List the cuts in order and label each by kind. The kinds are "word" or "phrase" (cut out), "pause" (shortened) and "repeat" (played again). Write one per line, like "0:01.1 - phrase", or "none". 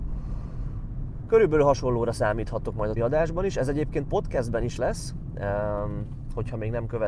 0:03.0 - word
0:04.8 - word